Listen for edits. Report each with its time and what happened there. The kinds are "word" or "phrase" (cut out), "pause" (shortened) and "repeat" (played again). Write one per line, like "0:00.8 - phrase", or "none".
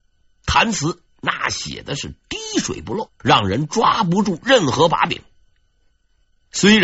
0:03.1 - pause